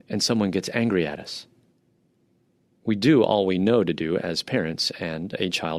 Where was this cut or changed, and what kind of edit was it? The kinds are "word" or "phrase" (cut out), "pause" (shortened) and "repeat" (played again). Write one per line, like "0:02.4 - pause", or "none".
none